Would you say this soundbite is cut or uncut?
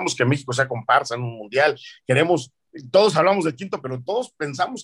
cut